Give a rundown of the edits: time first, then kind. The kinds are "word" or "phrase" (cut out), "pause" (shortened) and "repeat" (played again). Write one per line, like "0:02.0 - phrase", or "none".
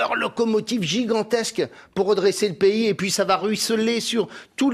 none